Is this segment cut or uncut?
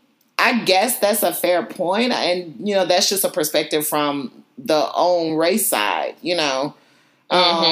uncut